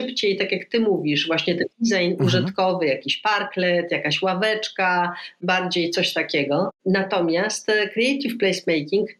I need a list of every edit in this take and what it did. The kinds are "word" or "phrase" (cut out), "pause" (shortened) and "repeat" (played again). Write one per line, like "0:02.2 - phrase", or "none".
0:01.7 - pause